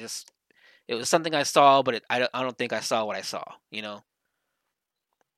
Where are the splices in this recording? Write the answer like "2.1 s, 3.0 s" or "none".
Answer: none